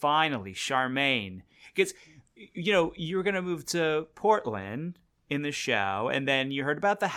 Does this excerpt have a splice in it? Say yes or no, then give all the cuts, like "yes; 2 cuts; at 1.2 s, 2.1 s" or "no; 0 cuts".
no; 0 cuts